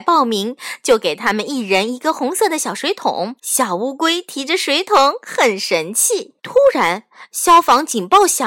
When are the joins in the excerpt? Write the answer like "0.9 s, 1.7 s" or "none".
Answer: 3.4 s, 6.4 s